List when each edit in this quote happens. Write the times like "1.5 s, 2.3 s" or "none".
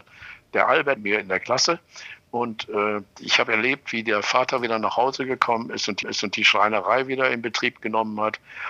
1.0 s, 3.1 s, 6.0 s

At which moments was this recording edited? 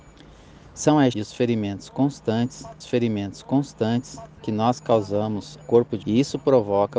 1.1 s, 2.8 s, 5.6 s, 6.0 s

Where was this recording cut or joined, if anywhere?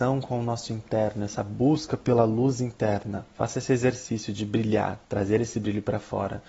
3.3 s, 5.0 s

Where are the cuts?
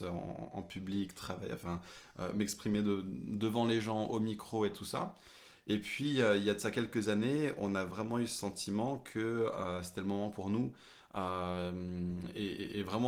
none

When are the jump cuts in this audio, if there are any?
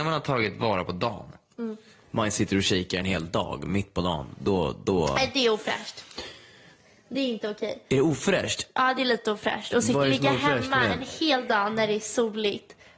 none

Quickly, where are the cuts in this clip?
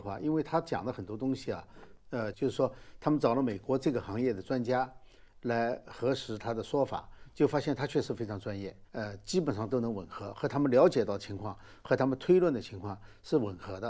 2.3 s, 8.9 s

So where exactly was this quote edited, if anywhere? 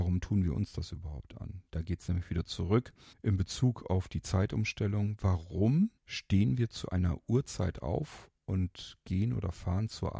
3.1 s, 6.0 s, 8.4 s

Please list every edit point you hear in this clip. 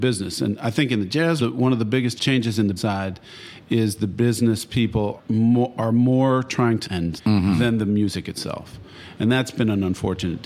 1.4 s, 2.2 s, 2.8 s, 5.2 s, 6.8 s, 7.2 s

